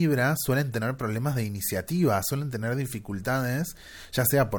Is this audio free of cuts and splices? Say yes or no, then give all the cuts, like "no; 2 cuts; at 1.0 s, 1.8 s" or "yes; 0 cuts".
yes; 0 cuts